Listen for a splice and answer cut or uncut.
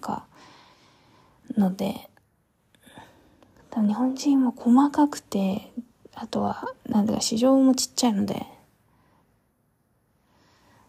uncut